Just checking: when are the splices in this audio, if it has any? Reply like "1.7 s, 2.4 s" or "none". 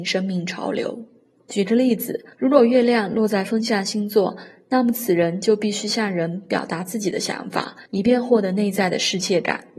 1.3 s, 2.3 s, 7.9 s

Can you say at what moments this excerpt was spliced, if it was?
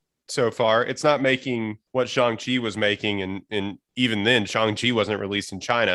1.9 s

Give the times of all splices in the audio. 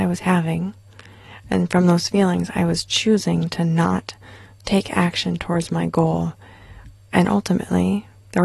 none

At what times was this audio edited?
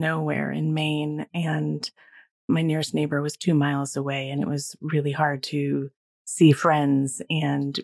none

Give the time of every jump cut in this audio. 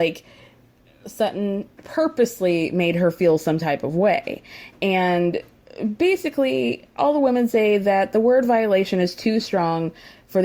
none

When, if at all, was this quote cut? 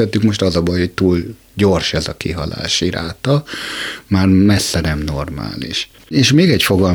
none

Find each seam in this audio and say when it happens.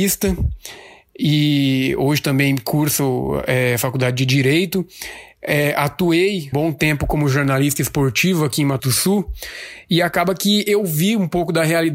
6.5 s, 8.8 s

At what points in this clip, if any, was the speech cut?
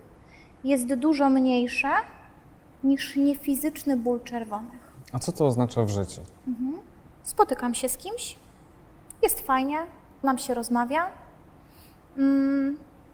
10.2 s

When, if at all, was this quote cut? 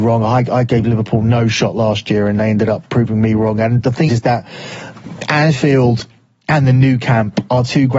4.1 s

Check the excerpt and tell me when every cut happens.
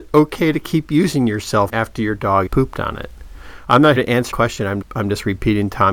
1.7 s, 2.5 s, 4.0 s, 4.3 s, 4.8 s

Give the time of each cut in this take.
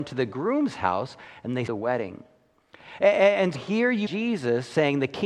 1.7 s, 3.5 s, 4.1 s

